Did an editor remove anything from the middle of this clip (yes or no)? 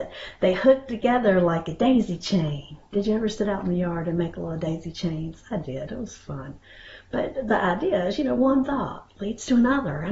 no